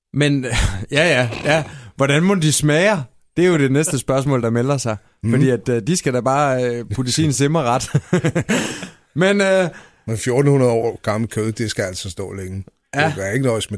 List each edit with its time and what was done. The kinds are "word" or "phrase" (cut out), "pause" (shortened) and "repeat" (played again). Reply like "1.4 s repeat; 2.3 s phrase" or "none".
none